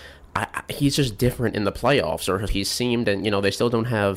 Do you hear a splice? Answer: yes; 1 cut; at 2.5 s

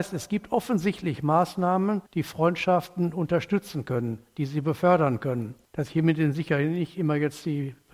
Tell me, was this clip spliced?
yes; 2 cuts; at 2.1 s, 5.6 s

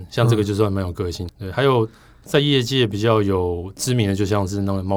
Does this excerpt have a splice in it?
yes; 1 cut; at 1.3 s

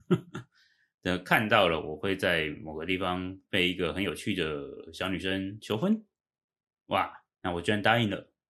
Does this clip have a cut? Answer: yes; 1 cut; at 7.3 s

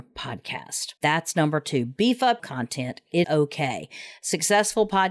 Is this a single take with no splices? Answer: no; 3 cuts; at 1.0 s, 2.4 s, 3.2 s

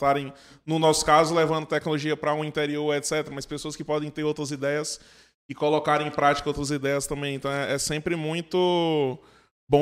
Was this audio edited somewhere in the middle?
no; 0 cuts

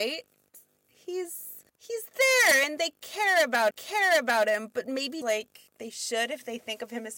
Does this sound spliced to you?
yes; 4 cuts; at 1.7 s, 3.7 s, 5.2 s, 5.7 s

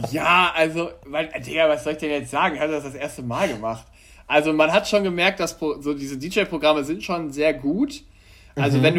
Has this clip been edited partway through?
no; 0 cuts

